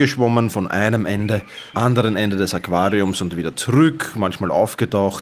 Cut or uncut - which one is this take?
cut